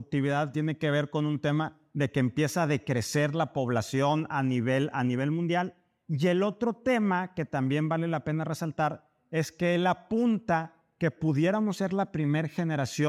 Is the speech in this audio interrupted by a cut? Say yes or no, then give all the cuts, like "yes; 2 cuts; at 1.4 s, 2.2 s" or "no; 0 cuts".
no; 0 cuts